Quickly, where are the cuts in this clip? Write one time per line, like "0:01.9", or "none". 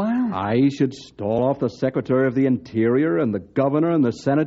none